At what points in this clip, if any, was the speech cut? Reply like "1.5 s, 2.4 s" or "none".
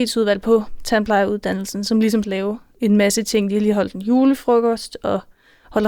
2.2 s

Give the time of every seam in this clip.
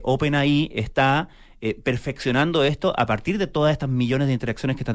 none

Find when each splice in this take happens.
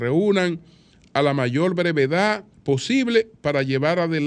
2.5 s

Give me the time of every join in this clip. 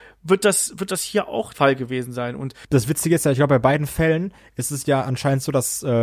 1.5 s

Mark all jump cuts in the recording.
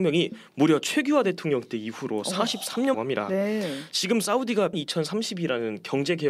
2.9 s, 4.7 s

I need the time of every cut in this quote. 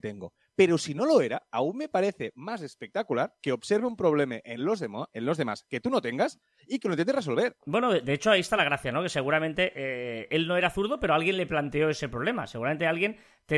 none

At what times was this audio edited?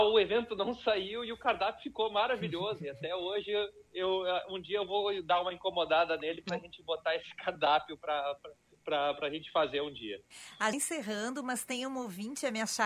10.7 s

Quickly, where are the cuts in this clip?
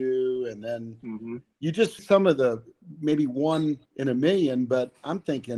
2.0 s, 3.9 s

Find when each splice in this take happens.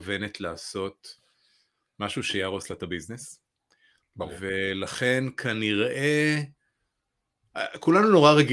none

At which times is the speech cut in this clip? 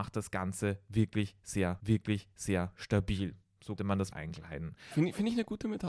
1.8 s, 3.8 s, 4.1 s

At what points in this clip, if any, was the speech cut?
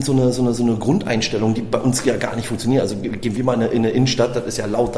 none

